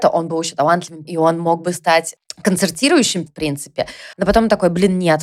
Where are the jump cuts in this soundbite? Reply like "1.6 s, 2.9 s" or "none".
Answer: 1.0 s, 3.3 s, 4.1 s